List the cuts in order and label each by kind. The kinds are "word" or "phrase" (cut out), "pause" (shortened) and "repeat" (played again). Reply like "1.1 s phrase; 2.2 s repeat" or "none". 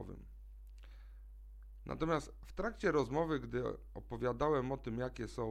none